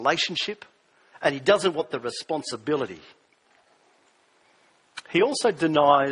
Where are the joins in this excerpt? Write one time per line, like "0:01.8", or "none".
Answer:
none